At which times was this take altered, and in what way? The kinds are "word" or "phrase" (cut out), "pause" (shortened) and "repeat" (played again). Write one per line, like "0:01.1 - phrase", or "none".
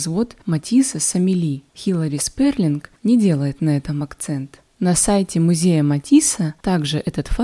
none